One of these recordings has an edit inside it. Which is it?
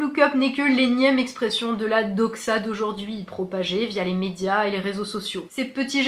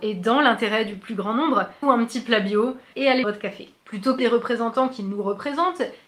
second; 3 cuts; at 1.8 s, 3.2 s, 4.2 s

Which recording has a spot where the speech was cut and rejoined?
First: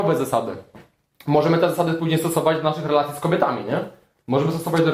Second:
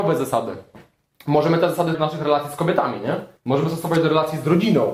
second; 2 cuts; at 1.9 s, 3.4 s

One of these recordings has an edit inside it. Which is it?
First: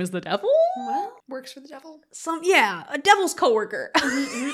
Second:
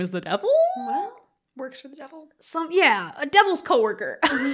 first; 1 cut; at 1.2 s

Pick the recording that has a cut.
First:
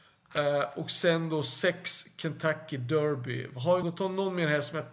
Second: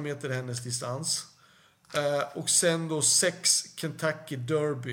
first; 1 cut; at 3.8 s

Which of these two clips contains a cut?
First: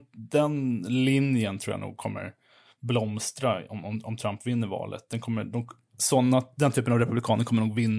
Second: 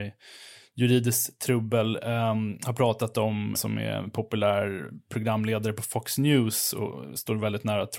second; 1 cut; at 3.5 s

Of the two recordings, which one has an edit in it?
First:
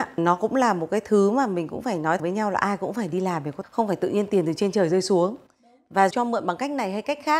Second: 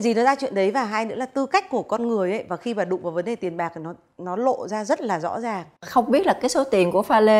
first; 3 cuts; at 2.2 s, 3.6 s, 6.1 s

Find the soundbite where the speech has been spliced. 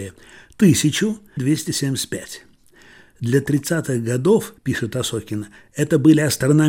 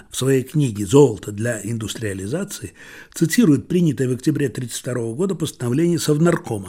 first; 2 cuts; at 1.4 s, 4.6 s

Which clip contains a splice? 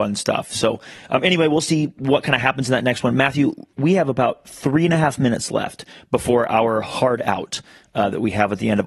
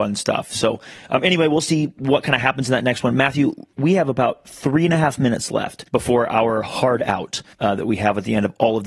second; 2 cuts; at 5.9 s, 7.5 s

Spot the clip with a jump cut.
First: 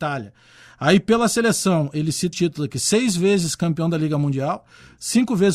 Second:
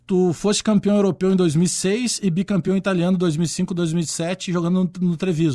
first; 1 cut; at 2.3 s

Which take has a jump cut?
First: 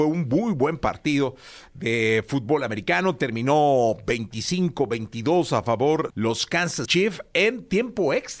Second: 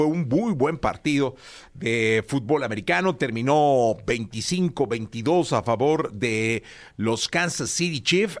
first; 2 cuts; at 6.1 s, 6.9 s

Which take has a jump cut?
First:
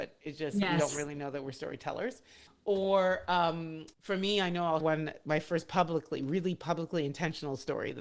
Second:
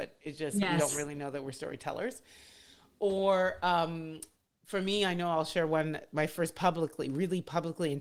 first; 3 cuts; at 2.5 s, 3.9 s, 4.8 s

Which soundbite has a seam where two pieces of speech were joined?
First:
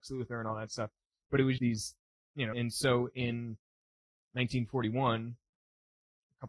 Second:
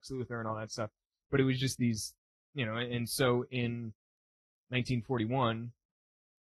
first; 2 cuts; at 1.6 s, 2.5 s

